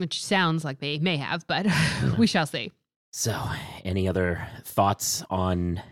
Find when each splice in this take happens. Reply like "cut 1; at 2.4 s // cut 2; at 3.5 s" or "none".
none

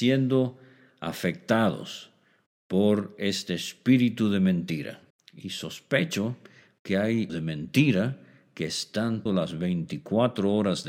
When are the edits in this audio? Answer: cut 1; at 5.1 s // cut 2; at 7.3 s // cut 3; at 9.3 s

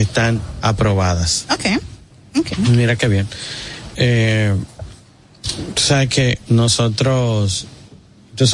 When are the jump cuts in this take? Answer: cut 1; at 3.9 s // cut 2; at 6.5 s

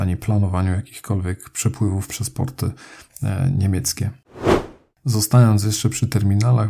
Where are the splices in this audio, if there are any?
cut 1; at 2.1 s

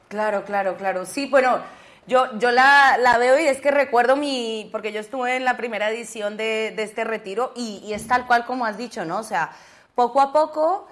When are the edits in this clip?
none

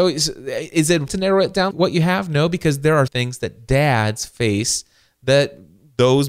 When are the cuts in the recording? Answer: cut 1; at 1.1 s // cut 2; at 1.7 s // cut 3; at 3.1 s

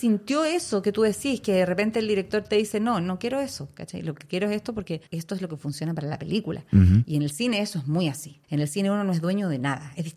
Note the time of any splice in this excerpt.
cut 1; at 5.1 s // cut 2; at 8.4 s

